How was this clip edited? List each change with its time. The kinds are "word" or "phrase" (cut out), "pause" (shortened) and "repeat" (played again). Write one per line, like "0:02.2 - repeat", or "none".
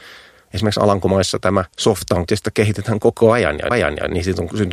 0:01.7 - pause
0:02.3 - word
0:03.7 - repeat